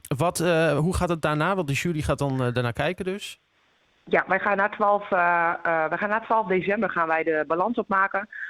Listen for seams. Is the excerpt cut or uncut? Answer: uncut